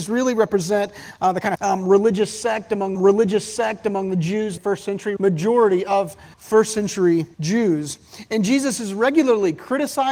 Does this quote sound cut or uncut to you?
cut